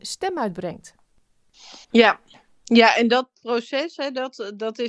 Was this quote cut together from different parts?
yes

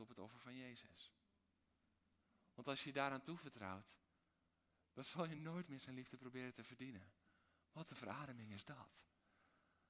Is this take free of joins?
yes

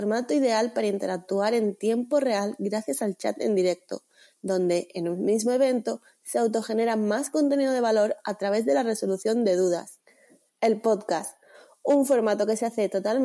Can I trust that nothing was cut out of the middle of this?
yes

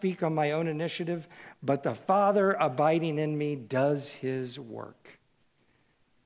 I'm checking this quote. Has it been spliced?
no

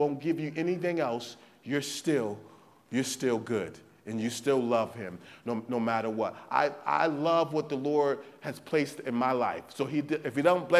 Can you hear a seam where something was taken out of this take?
no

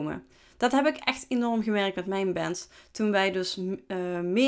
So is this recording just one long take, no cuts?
yes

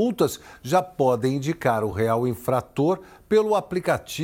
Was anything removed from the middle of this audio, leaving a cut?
no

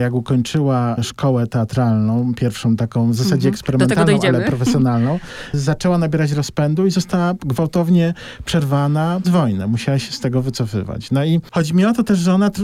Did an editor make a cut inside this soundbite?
yes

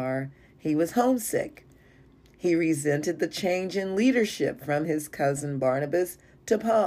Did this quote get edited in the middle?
no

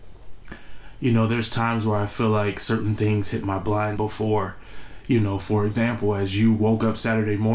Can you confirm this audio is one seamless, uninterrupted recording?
no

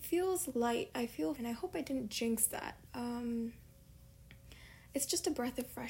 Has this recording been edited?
yes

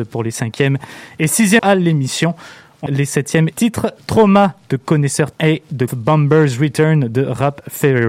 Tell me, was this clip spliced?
yes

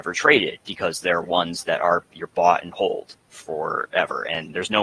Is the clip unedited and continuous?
yes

